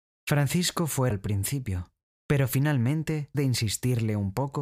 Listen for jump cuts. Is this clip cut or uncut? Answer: cut